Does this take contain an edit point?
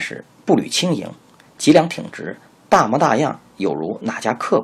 no; 0 cuts

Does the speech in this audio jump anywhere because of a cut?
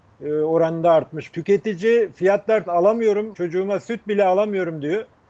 yes; 3 cuts; at 1.3 s, 2.7 s, 3.3 s

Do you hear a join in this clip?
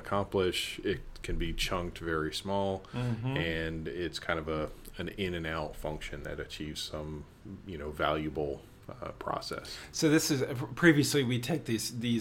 no; 0 cuts

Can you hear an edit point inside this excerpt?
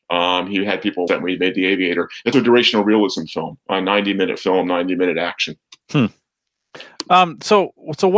yes; 3 cuts; at 1.1 s, 2.3 s, 5.8 s

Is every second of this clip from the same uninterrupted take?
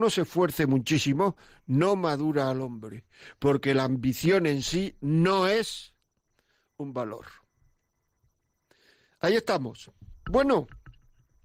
yes; 0 cuts

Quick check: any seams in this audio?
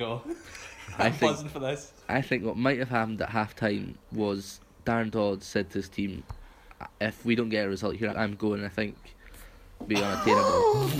yes; 4 cuts; at 2.0 s, 6.9 s, 8.1 s, 9.9 s

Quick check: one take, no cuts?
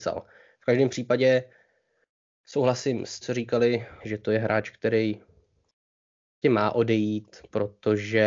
no; 3 cuts; at 3.2 s, 4.0 s, 6.4 s

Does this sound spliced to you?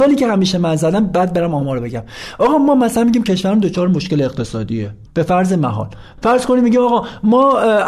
no; 0 cuts

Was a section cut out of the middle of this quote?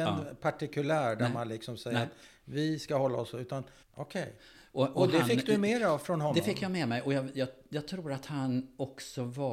yes; 1 cut; at 3.8 s

